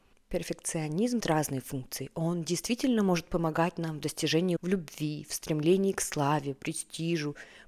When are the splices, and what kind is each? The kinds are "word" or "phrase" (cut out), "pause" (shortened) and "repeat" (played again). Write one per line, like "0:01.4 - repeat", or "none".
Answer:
0:01.2 - word
0:04.6 - word

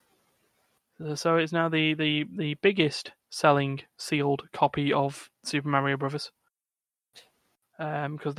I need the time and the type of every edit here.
0:03.2 - pause
0:05.3 - pause

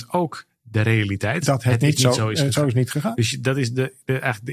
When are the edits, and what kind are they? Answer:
none

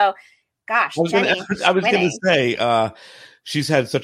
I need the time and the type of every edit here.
none

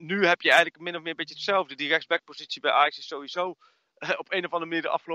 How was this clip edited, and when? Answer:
none

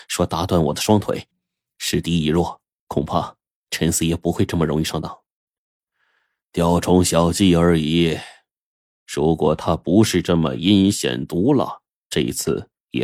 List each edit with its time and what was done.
none

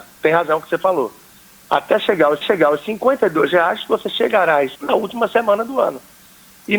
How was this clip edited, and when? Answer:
0:02.4 - repeat
0:04.7 - word

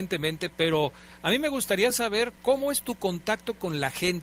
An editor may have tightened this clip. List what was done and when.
none

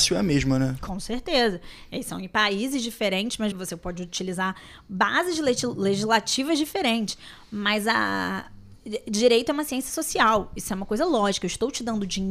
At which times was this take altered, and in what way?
0:03.5 - word

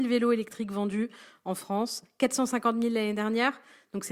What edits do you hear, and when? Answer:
none

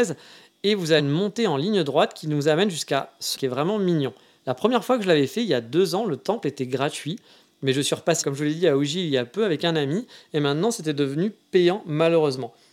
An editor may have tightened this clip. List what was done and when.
0:01.0 - word
0:03.4 - word
0:08.2 - word

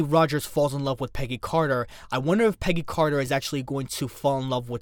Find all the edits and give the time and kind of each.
none

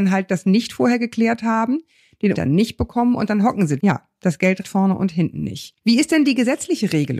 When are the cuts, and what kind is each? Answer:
0:02.3 - word
0:03.8 - phrase
0:04.6 - word

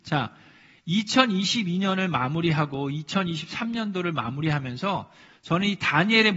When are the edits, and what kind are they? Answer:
none

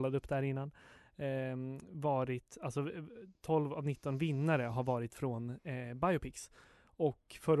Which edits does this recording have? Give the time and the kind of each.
none

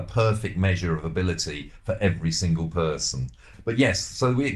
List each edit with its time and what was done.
none

